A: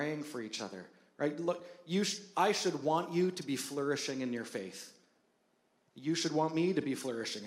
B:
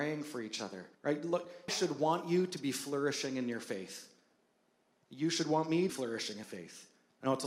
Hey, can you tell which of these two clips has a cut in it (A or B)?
B